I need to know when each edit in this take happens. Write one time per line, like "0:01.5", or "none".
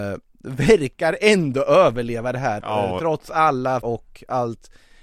0:02.6
0:03.8